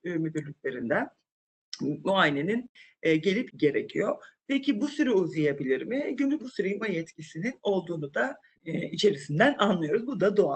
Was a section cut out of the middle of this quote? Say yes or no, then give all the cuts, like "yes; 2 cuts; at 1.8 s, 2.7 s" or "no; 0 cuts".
yes; 4 cuts; at 3.5 s, 6.4 s, 6.8 s, 8.5 s